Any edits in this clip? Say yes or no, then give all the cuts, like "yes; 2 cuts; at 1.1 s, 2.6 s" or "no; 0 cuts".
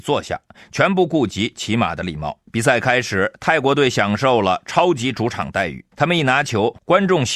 yes; 2 cuts; at 2.5 s, 5.9 s